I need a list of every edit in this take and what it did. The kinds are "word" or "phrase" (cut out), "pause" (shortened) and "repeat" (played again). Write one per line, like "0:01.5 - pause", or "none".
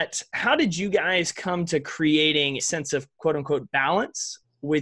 0:02.6 - word